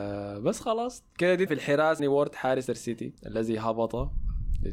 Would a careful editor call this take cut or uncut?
cut